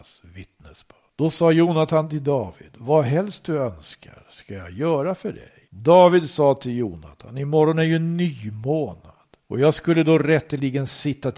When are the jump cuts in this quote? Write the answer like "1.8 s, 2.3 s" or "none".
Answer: 1.1 s, 5.7 s, 9.4 s